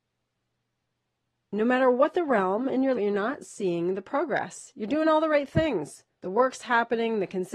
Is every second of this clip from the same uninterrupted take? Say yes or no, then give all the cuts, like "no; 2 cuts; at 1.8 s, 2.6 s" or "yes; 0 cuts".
no; 2 cuts; at 2.9 s, 6.1 s